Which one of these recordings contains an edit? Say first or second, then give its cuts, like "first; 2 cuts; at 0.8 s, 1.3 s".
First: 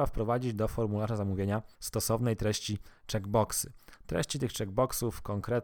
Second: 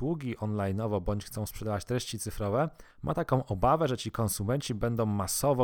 second; 1 cut; at 2.9 s